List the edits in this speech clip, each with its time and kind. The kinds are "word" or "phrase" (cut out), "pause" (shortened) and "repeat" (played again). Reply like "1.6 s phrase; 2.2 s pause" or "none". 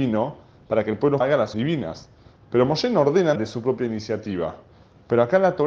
1.2 s word; 1.5 s word; 3.4 s word